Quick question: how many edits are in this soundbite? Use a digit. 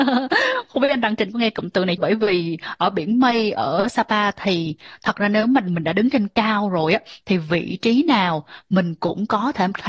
1